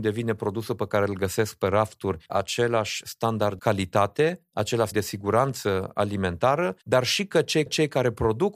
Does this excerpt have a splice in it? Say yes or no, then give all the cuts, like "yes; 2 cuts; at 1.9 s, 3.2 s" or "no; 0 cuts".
yes; 5 cuts; at 2.3 s, 3.6 s, 4.9 s, 6.8 s, 7.7 s